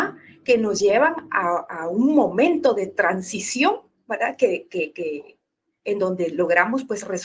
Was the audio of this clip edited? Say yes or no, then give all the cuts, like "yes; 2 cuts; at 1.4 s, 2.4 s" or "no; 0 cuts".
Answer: no; 0 cuts